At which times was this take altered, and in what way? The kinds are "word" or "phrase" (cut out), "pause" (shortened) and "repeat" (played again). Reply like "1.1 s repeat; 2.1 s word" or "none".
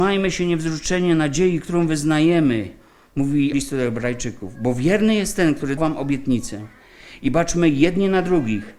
3.5 s word; 5.8 s word